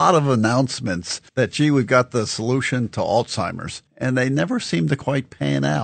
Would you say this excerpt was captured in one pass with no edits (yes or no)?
no